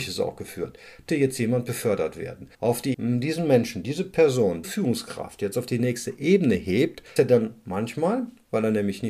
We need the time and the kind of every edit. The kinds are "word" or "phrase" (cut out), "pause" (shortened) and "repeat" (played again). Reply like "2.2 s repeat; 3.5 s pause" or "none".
1.1 s word; 2.5 s pause; 2.9 s word; 4.6 s word; 7.2 s word